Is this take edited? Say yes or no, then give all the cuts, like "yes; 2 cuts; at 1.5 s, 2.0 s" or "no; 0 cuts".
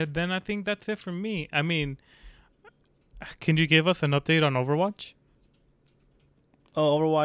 no; 0 cuts